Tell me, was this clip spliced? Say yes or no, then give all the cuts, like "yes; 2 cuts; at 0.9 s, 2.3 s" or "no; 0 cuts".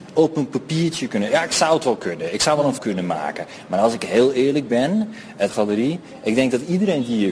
yes; 2 cuts; at 2.8 s, 5.5 s